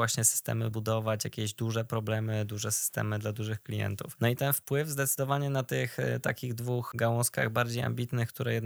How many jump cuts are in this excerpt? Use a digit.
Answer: 0